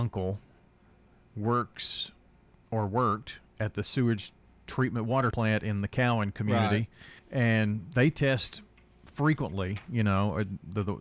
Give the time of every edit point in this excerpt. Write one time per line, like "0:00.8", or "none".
0:05.3
0:07.2